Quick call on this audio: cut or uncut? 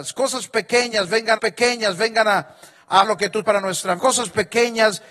cut